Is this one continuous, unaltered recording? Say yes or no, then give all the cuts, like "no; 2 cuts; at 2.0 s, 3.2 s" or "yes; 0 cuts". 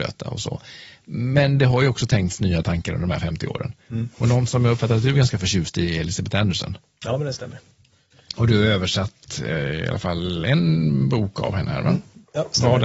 yes; 0 cuts